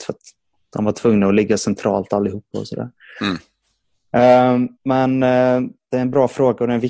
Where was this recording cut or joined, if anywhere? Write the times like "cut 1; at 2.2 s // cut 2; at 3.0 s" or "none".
cut 1; at 4.8 s